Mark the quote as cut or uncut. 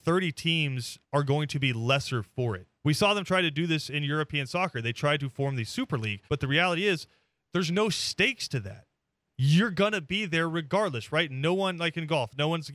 cut